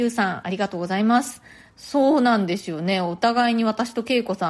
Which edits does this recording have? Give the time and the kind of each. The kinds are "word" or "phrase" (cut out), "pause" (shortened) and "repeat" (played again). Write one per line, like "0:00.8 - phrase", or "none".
none